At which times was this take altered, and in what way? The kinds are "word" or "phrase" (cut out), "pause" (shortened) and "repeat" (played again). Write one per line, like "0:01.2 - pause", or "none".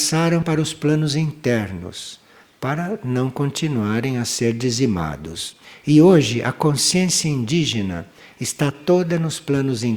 none